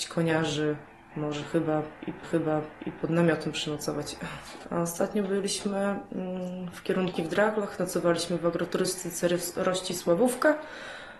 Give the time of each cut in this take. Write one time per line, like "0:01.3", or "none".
0:02.2
0:07.2